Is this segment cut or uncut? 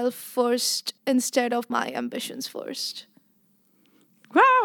cut